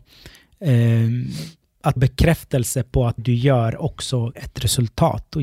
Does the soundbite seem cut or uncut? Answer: cut